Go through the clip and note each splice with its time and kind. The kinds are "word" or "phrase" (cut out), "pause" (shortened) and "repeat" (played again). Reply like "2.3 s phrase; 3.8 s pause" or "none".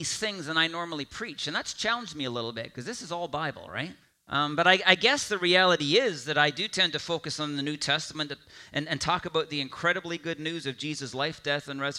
4.0 s pause